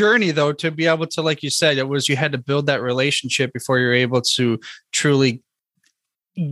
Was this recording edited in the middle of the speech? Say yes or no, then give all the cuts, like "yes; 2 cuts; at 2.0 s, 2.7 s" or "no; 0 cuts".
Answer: no; 0 cuts